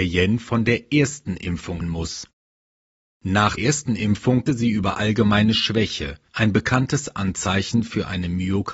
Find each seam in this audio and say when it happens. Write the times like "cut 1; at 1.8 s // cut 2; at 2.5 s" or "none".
cut 1; at 1.8 s // cut 2; at 3.6 s // cut 3; at 4.5 s // cut 4; at 6.3 s